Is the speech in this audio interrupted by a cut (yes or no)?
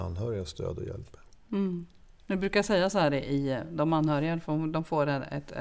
no